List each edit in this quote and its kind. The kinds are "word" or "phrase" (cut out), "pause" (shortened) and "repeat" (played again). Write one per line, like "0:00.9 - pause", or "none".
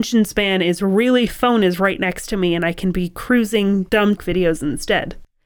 0:01.3 - phrase
0:04.2 - word